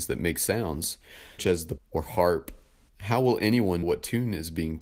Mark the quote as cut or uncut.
cut